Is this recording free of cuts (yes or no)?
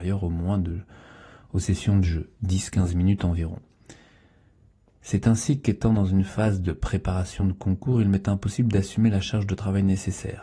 yes